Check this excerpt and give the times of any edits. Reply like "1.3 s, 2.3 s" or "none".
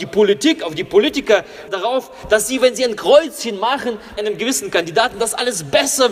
1.7 s, 4.2 s